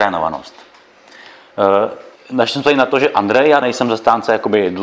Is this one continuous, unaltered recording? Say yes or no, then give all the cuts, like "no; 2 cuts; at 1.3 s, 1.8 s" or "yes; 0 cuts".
no; 2 cuts; at 2.2 s, 3.6 s